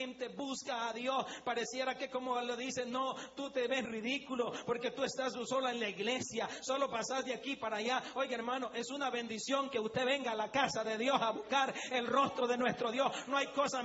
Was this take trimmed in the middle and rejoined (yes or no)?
yes